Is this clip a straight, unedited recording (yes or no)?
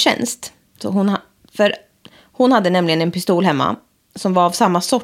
yes